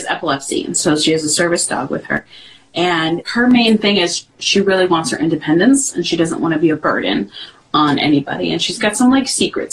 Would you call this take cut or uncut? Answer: uncut